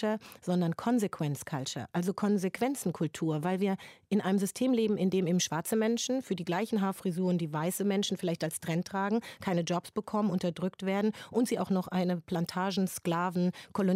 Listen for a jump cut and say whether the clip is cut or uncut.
uncut